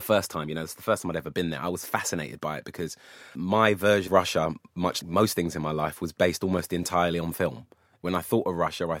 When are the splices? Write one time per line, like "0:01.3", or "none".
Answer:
0:04.1
0:05.0
0:08.0